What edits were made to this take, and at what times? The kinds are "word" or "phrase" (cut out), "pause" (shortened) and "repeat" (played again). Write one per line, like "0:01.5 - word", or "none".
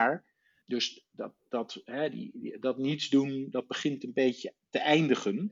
none